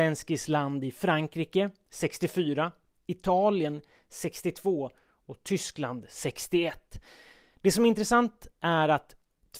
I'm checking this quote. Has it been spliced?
no; 0 cuts

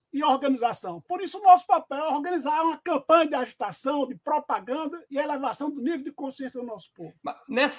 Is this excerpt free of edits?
yes; 0 cuts

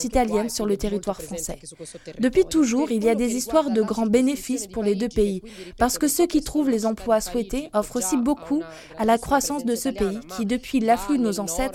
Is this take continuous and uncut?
yes; 0 cuts

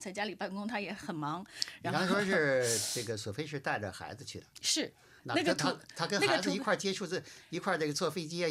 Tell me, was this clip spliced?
yes; 1 cut; at 5.2 s

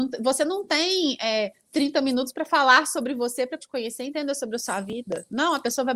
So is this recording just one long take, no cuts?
no; 1 cut; at 3.6 s

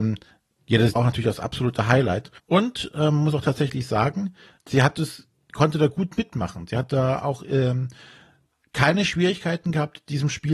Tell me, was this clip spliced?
yes; 3 cuts; at 1.0 s, 2.4 s, 4.6 s

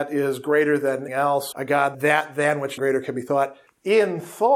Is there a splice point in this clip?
yes; 4 cuts; at 1.1 s, 1.5 s, 1.9 s, 2.8 s

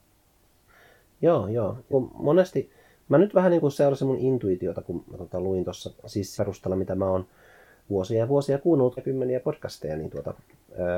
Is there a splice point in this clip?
yes; 3 cuts; at 1.9 s, 6.4 s, 9.0 s

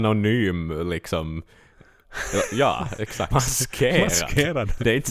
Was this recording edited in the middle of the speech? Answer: yes; 1 cut; at 3.3 s

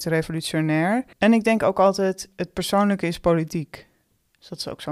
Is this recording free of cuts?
no; 1 cut; at 1.1 s

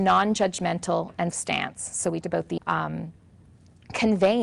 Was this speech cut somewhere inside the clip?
yes; 3 cuts; at 1.3 s, 2.2 s, 2.6 s

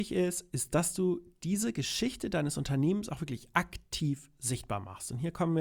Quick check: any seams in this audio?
no; 0 cuts

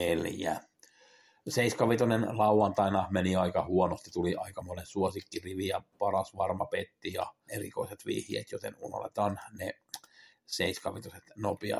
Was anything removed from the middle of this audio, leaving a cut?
yes; 1 cut; at 7.5 s

